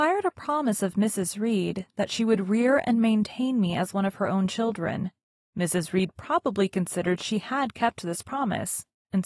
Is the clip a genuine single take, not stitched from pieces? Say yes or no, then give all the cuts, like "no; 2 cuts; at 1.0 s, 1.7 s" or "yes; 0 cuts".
yes; 0 cuts